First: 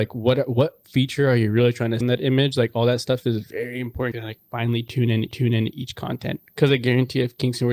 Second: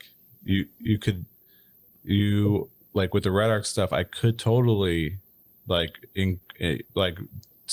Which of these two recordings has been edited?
first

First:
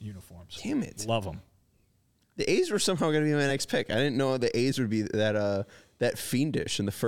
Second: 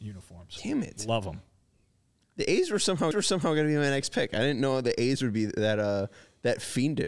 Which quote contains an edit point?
second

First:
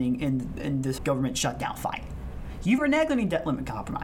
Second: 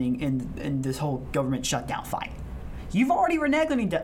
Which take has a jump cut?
first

